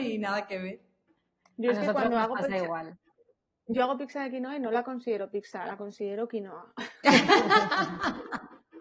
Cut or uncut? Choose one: uncut